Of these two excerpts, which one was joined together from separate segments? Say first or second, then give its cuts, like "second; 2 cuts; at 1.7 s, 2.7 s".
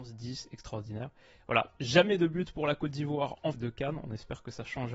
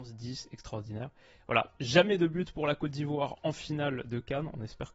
first; 1 cut; at 3.5 s